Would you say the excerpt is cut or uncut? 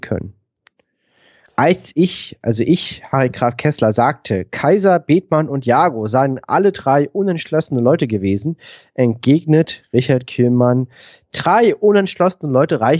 uncut